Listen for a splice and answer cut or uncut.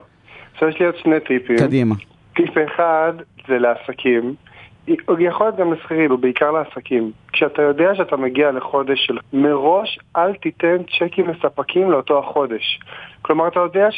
cut